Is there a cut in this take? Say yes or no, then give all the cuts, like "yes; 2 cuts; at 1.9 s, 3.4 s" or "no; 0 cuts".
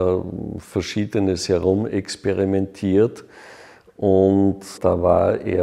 no; 0 cuts